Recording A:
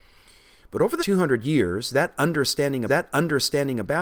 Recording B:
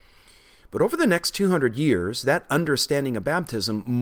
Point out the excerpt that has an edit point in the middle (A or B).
A